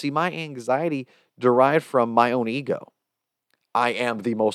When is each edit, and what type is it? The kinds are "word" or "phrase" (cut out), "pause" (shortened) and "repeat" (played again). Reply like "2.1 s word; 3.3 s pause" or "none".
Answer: none